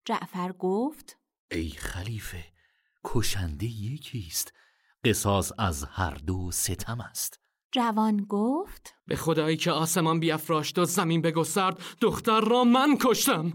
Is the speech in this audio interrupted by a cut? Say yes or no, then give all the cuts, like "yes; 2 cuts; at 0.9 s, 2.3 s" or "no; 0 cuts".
yes; 1 cut; at 9.0 s